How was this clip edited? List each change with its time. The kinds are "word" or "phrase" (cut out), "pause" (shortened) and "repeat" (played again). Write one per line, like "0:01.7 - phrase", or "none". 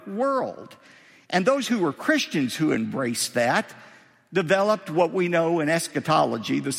none